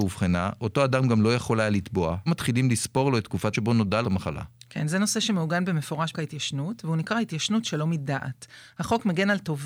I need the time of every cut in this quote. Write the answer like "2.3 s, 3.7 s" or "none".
2.3 s, 3.5 s, 4.0 s, 6.1 s